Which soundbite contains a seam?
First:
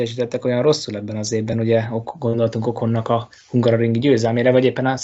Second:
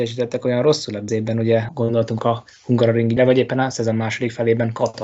second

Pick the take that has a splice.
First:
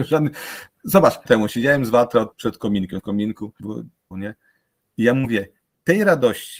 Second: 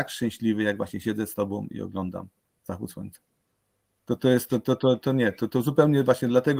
first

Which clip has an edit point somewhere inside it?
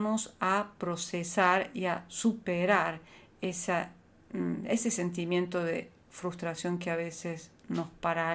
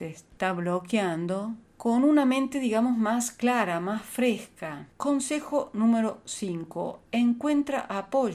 second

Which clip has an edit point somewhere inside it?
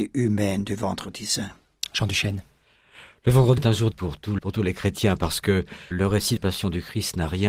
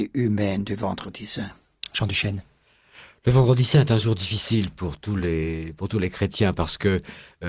first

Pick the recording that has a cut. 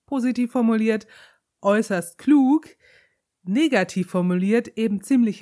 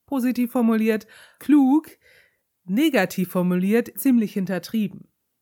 second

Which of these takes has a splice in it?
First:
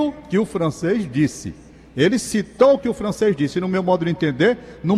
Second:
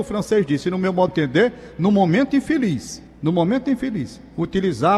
second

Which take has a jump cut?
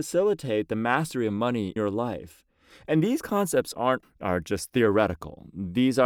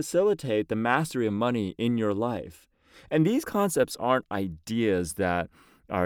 first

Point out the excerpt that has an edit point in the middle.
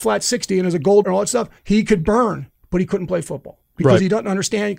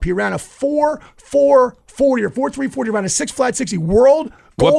first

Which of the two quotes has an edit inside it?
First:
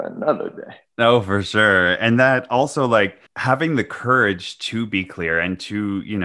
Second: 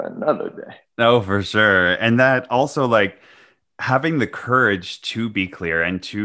first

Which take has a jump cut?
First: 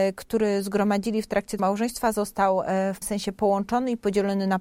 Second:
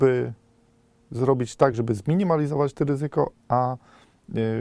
first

